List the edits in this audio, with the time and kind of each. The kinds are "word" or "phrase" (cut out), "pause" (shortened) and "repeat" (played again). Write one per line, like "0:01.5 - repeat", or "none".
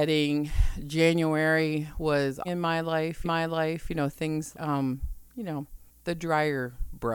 0:02.4 - phrase
0:03.2 - repeat
0:04.5 - word
0:05.3 - pause
0:05.9 - pause